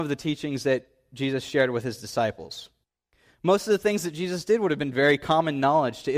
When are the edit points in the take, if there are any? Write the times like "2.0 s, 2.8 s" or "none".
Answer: 3.1 s